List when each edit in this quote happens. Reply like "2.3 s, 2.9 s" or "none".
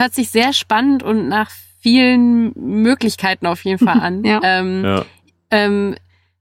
none